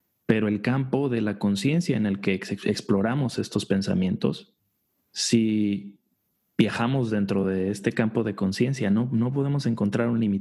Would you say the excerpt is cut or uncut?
uncut